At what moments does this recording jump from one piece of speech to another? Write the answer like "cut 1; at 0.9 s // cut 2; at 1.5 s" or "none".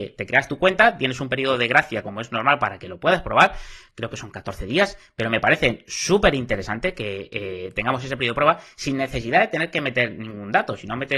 none